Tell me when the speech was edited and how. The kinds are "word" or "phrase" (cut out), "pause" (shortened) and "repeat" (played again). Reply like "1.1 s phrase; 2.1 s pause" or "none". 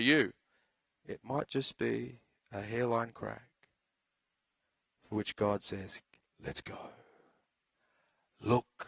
none